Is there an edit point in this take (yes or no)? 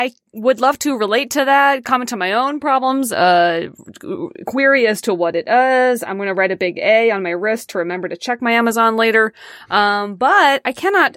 no